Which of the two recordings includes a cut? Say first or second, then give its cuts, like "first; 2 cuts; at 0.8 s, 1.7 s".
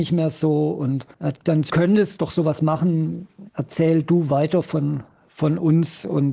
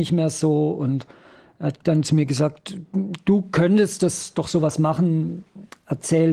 first; 4 cuts; at 1.1 s, 1.7 s, 2.2 s, 3.5 s